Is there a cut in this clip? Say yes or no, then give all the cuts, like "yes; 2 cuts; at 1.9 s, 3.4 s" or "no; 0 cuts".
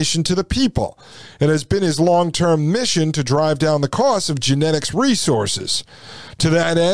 no; 0 cuts